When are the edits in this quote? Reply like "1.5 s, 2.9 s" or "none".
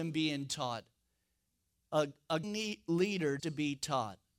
2.4 s, 3.4 s